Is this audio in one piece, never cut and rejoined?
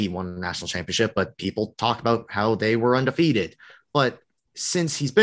yes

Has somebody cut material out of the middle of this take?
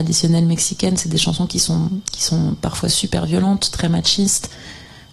no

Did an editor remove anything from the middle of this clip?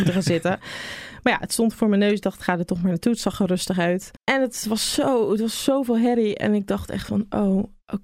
yes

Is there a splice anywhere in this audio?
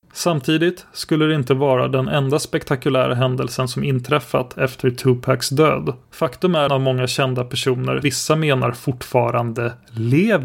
yes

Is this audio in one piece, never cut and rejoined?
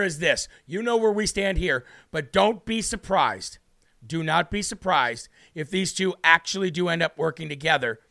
yes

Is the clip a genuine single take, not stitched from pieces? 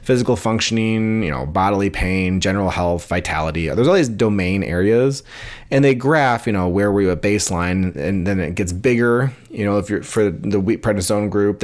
no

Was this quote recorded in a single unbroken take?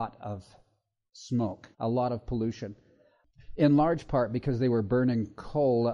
no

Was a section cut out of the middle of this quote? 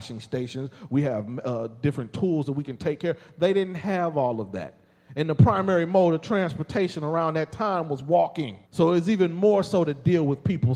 yes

